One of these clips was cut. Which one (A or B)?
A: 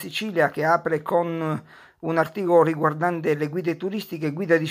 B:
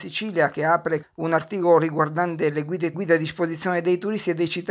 B